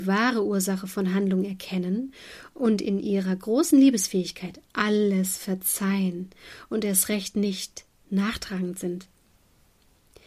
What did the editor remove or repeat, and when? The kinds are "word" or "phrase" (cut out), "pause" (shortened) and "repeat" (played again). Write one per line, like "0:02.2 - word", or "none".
0:04.7 - pause